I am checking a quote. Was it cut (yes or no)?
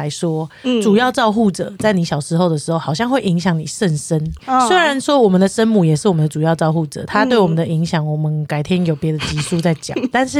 no